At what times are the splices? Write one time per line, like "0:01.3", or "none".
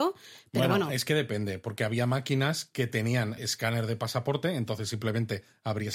0:03.4